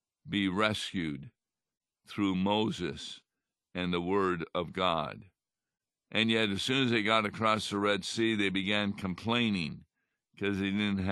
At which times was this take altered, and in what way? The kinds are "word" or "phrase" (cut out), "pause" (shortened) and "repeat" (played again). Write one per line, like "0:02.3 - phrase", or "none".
none

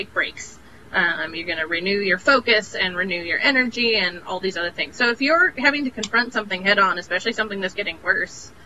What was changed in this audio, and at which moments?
0:07.7 - word

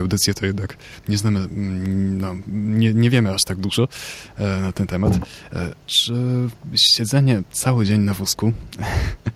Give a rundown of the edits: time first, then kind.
0:05.8 - pause

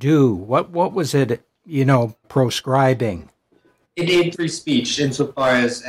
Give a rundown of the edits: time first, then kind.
0:02.2 - word
0:04.3 - word

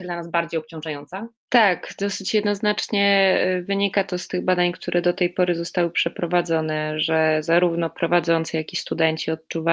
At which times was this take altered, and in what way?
0:01.4 - pause

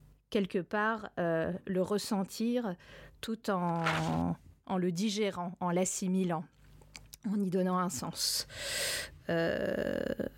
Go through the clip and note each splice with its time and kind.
none

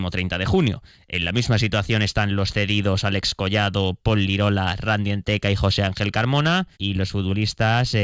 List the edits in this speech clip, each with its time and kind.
0:06.7 - pause

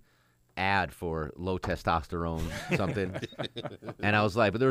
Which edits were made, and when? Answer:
none

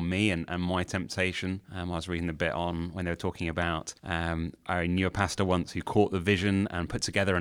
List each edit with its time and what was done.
0:01.7 - pause
0:04.0 - pause

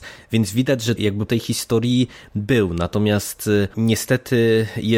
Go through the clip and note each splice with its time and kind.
0:01.0 - word
0:01.3 - word
0:03.7 - word

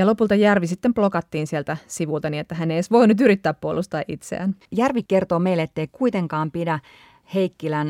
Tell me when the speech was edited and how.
0:04.6 - pause

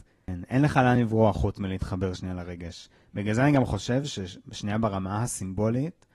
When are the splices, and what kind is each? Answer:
none

